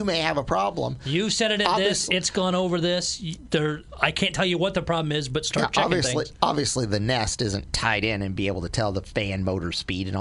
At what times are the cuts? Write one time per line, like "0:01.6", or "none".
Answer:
none